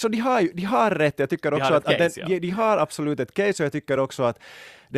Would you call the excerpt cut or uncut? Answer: uncut